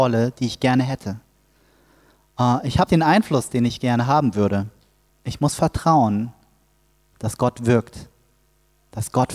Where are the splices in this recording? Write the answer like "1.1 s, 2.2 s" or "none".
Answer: 2.9 s, 5.1 s